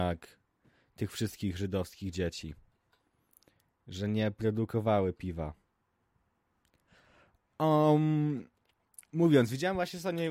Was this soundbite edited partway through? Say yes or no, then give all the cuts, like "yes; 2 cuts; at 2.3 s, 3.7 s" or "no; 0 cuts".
no; 0 cuts